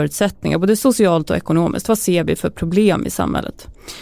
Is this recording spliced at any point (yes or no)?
no